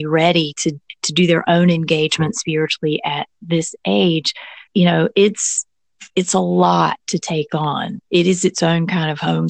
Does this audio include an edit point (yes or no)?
yes